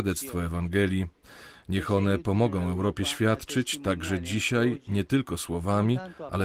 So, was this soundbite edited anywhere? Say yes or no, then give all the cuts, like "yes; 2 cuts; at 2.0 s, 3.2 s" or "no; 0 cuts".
no; 0 cuts